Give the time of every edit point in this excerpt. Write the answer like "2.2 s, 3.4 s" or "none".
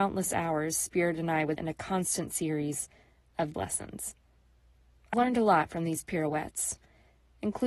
1.6 s, 3.5 s, 5.1 s

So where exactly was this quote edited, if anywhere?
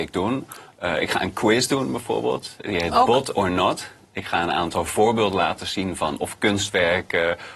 none

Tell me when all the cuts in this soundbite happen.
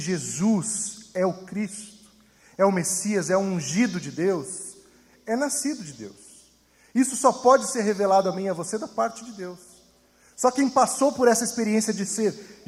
none

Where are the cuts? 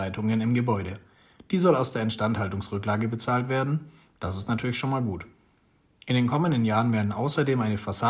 none

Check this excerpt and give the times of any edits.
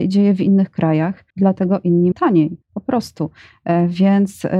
1.3 s, 2.1 s, 2.6 s

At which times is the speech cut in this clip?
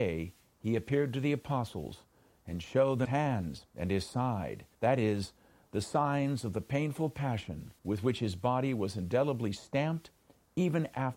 3.1 s, 4.7 s, 7.8 s

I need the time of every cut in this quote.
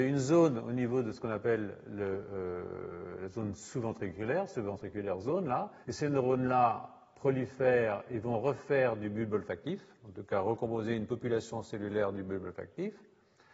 5.8 s

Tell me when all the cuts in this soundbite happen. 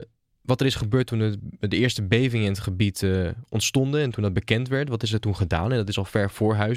none

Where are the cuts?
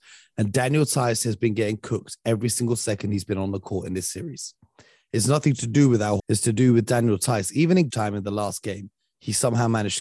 6.2 s, 7.9 s

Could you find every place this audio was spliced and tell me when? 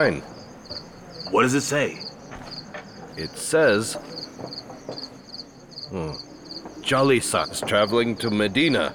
none

